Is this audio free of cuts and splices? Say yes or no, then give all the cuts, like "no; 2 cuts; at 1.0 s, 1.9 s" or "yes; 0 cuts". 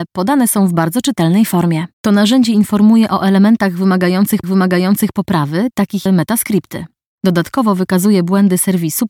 no; 3 cuts; at 1.9 s, 4.4 s, 6.1 s